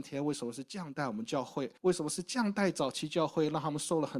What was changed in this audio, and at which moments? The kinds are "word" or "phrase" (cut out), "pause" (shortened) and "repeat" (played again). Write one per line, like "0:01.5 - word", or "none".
0:01.8 - pause